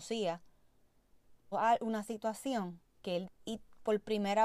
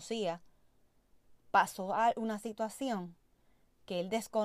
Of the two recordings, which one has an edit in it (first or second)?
first